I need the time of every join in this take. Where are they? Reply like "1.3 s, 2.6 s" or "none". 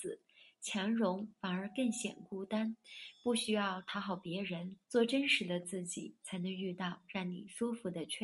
4.8 s